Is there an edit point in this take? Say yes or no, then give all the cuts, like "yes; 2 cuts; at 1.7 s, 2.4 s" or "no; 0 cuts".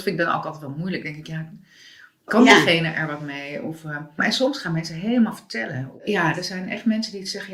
no; 0 cuts